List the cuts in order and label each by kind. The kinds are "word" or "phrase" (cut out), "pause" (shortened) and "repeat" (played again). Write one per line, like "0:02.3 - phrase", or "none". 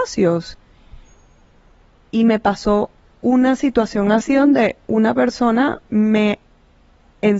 none